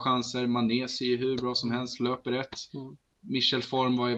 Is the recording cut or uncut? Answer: cut